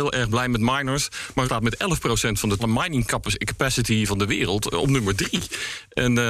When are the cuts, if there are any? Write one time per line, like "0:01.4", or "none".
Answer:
0:01.5
0:02.6